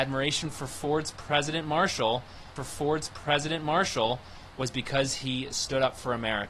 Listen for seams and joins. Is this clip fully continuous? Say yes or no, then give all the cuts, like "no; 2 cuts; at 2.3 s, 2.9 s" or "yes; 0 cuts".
no; 1 cut; at 2.6 s